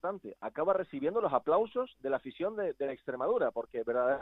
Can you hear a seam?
no; 0 cuts

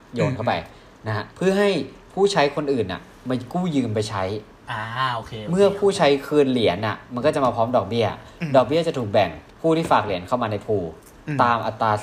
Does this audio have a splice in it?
yes; 2 cuts; at 1.3 s, 9.5 s

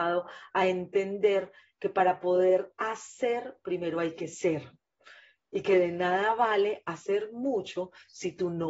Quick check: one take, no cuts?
yes; 0 cuts

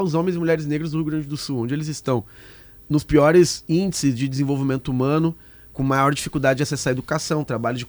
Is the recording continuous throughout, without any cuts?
yes; 0 cuts

